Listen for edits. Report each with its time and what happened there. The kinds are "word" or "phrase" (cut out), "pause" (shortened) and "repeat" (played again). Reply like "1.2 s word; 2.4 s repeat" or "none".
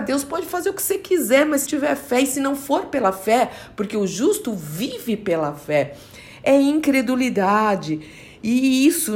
1.7 s word

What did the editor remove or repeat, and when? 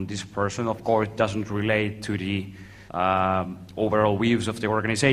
2.9 s pause

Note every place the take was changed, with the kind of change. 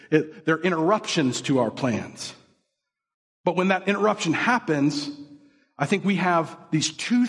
3.1 s pause

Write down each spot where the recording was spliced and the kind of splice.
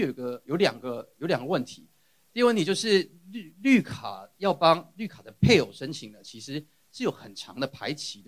none

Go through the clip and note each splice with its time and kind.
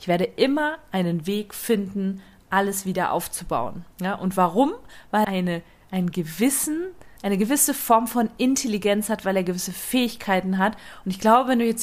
3.9 s pause; 5.2 s word; 7.2 s pause

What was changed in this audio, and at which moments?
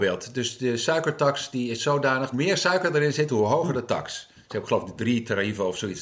2.3 s phrase

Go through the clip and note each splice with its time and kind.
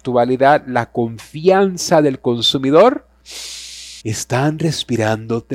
4.0 s pause

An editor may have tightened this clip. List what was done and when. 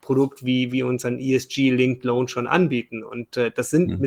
none

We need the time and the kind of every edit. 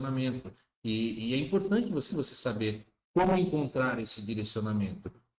2.1 s repeat

